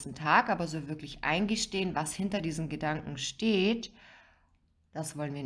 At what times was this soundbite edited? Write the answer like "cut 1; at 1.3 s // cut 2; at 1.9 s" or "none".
none